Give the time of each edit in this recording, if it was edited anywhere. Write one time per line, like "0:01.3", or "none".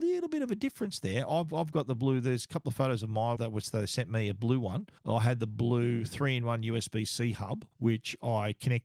0:03.4
0:05.0
0:07.7